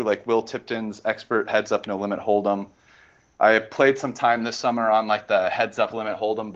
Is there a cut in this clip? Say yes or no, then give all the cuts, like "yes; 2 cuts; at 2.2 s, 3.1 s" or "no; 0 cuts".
no; 0 cuts